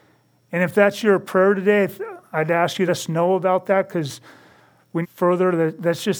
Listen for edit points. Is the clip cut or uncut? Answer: cut